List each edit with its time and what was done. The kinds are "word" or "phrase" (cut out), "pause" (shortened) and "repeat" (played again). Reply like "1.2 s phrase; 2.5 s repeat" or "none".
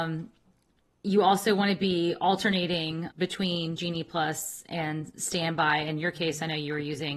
3.1 s word